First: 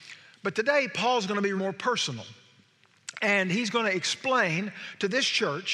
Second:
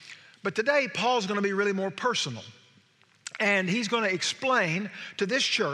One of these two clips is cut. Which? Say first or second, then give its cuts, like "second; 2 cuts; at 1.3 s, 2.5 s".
first; 1 cut; at 1.6 s